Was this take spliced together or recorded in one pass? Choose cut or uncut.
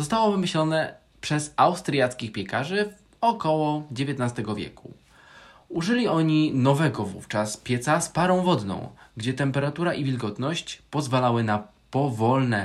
uncut